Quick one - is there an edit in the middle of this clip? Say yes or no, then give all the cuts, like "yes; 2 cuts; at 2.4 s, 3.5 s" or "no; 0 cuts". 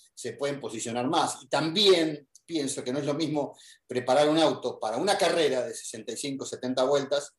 no; 0 cuts